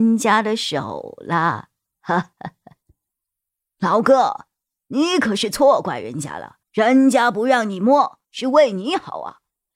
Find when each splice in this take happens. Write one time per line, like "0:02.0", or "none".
0:02.3
0:06.6
0:08.2